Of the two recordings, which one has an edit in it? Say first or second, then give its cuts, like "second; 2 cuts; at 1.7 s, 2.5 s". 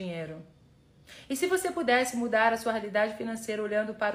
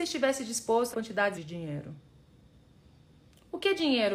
second; 2 cuts; at 0.9 s, 1.3 s